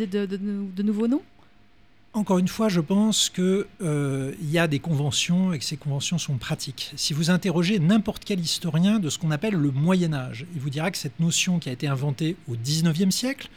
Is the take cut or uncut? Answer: uncut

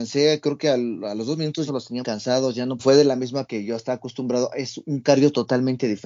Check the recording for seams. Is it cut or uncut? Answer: cut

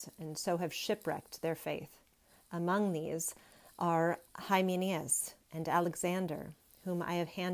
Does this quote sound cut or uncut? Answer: uncut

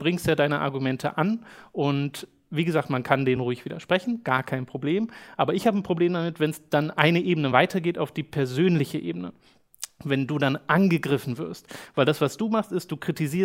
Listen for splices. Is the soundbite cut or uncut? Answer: uncut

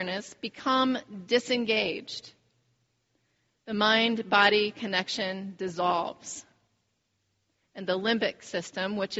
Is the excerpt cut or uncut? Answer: uncut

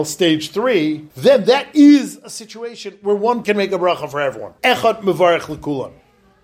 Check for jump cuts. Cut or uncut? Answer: cut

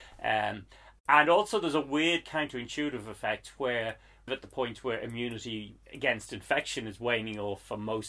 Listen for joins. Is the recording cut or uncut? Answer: cut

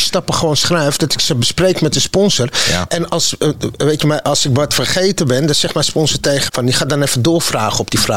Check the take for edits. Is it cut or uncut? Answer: cut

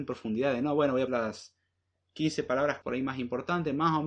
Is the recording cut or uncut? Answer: cut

